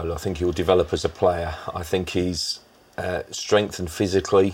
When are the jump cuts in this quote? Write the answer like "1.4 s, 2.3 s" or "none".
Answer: none